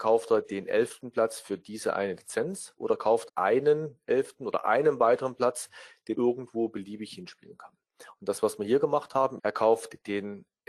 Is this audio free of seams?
no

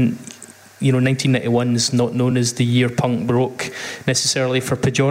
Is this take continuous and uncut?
yes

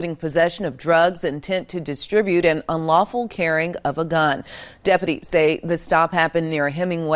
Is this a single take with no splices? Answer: yes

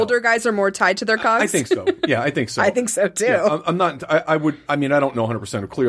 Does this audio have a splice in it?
no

